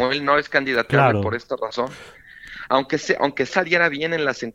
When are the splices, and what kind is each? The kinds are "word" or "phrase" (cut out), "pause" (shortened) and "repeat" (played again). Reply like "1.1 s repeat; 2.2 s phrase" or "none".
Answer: 3.5 s word